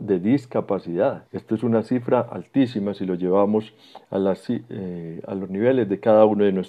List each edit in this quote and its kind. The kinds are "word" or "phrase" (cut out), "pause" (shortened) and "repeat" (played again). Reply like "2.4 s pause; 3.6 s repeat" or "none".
1.3 s pause